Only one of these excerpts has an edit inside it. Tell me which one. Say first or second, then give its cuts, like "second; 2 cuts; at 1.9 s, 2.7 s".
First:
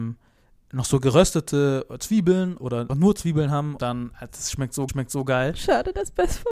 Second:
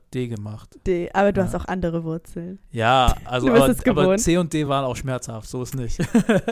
first; 4 cuts; at 2.6 s, 2.9 s, 3.8 s, 4.9 s